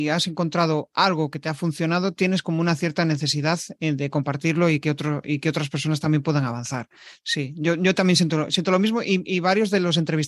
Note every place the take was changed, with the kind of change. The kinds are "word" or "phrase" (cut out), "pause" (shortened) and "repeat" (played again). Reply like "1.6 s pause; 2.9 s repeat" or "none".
none